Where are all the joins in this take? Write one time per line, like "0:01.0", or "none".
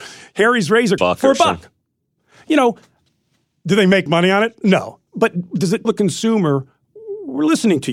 0:01.0
0:04.1
0:05.8